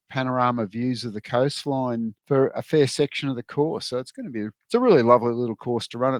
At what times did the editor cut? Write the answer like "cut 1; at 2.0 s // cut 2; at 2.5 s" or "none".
cut 1; at 2.2 s // cut 2; at 4.6 s